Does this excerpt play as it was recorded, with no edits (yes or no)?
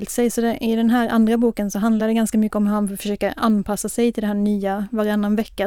yes